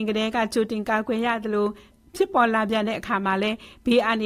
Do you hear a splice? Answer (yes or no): no